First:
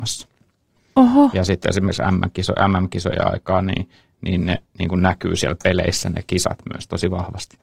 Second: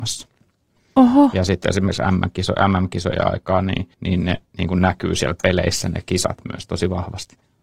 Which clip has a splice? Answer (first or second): second